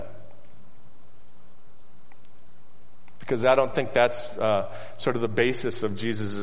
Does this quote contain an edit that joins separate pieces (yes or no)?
no